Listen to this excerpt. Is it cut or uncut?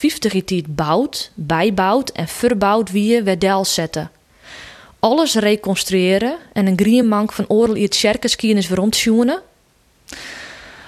uncut